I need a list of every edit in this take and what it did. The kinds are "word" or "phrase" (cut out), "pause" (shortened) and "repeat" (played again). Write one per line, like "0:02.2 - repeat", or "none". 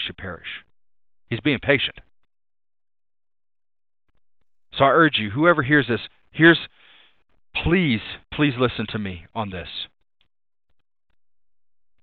0:08.2 - pause